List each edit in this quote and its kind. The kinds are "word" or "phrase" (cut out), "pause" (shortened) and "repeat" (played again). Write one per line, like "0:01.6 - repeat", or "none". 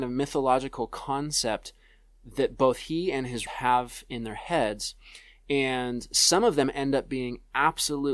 0:03.5 - word